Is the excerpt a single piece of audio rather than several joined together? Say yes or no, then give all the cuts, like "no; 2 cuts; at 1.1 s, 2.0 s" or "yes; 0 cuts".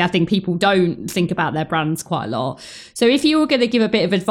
yes; 0 cuts